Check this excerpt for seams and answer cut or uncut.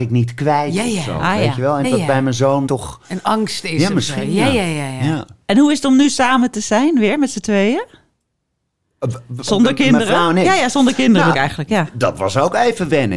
cut